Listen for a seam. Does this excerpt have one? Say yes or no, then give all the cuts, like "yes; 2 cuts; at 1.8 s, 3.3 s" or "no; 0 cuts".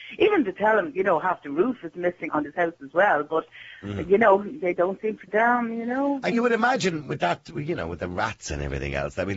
yes; 4 cuts; at 0.9 s, 2.3 s, 5.3 s, 6.3 s